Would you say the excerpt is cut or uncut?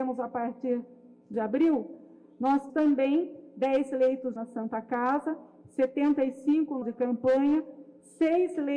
cut